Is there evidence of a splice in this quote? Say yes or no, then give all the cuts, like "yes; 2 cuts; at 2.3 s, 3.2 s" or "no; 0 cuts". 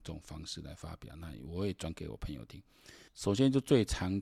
yes; 1 cut; at 3.1 s